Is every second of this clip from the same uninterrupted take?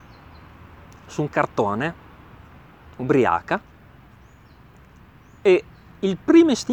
yes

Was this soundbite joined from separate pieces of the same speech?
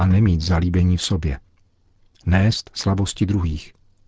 no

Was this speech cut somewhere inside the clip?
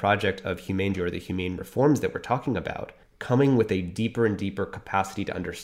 yes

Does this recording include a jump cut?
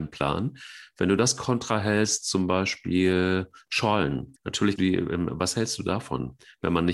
yes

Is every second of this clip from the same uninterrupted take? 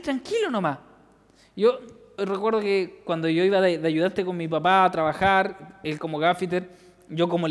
no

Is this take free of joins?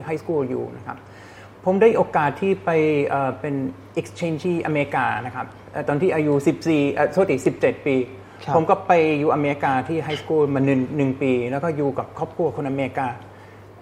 no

